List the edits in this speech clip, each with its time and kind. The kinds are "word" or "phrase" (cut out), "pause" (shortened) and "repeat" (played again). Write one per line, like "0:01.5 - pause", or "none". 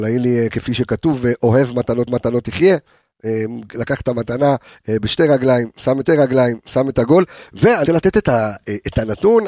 0:02.1 - repeat
0:06.1 - repeat
0:07.9 - word